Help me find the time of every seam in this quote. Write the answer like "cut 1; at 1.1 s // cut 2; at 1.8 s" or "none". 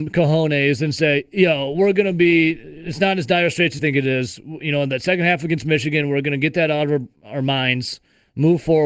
cut 1; at 3.8 s // cut 2; at 7.2 s